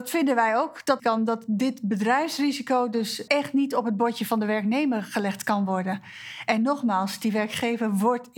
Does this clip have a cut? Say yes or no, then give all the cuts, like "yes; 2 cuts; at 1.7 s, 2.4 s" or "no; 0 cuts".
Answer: yes; 2 cuts; at 1.0 s, 3.3 s